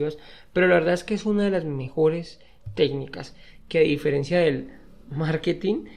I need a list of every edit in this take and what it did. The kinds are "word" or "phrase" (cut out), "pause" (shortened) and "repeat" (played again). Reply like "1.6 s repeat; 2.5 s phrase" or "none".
5.0 s word

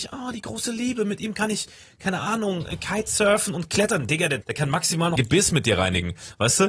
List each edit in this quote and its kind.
4.4 s word; 5.2 s word

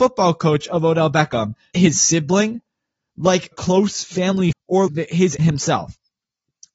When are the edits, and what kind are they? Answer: 1.7 s word; 3.5 s word; 4.5 s word; 4.9 s word; 5.4 s word

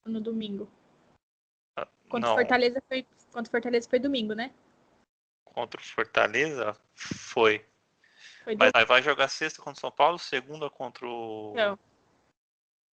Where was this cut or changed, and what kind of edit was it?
8.7 s word

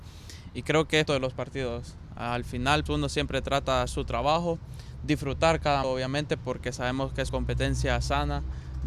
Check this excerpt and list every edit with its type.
1.1 s word; 2.9 s word; 3.9 s word; 5.8 s word; 7.3 s word

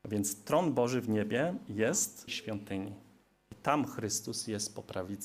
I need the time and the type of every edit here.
2.3 s phrase

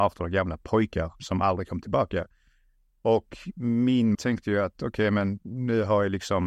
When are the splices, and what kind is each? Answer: 1.2 s word; 4.1 s word

